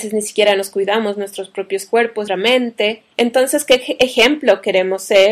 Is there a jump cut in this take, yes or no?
yes